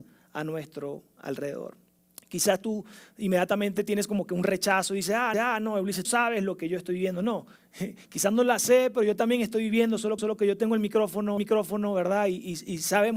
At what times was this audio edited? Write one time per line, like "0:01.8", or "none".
0:02.0
0:05.3
0:06.0
0:07.6
0:10.2
0:11.4